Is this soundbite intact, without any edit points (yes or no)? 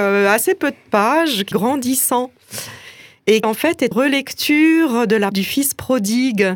no